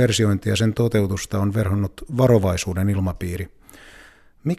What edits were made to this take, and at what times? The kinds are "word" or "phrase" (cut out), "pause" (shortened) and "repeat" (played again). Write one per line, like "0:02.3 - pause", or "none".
none